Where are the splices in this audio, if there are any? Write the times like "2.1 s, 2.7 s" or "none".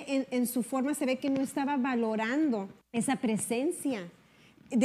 2.8 s